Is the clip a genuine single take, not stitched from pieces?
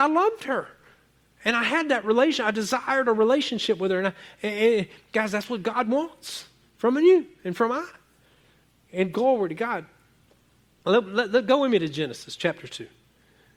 yes; 0 cuts

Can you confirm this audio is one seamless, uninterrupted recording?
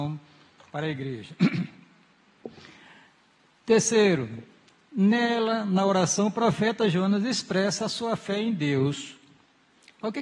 yes; 0 cuts

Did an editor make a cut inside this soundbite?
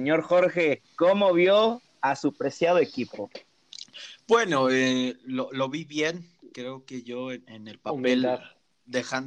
no; 0 cuts

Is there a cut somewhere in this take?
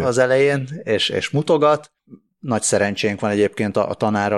no; 0 cuts

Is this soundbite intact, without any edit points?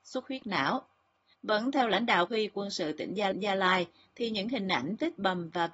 no; 2 cuts; at 2.3 s, 3.3 s

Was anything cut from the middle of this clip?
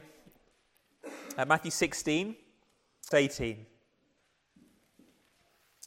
yes; 1 cut; at 3.1 s

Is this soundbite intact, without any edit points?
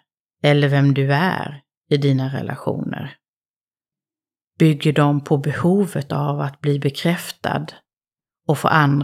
yes; 0 cuts

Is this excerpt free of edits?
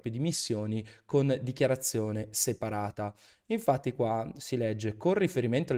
yes; 0 cuts

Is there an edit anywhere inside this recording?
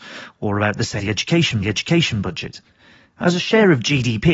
yes; 2 cuts; at 1.0 s, 1.6 s

